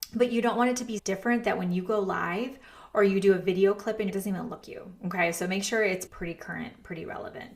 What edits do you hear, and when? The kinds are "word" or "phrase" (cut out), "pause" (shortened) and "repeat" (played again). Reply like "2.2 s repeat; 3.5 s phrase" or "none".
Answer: 1.0 s word; 4.1 s phrase; 4.6 s word; 6.1 s word